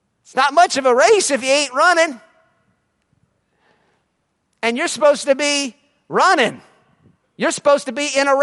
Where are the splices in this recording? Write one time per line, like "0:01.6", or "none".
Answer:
none